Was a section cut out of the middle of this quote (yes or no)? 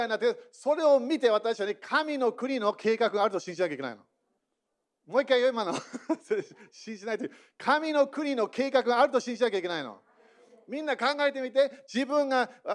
yes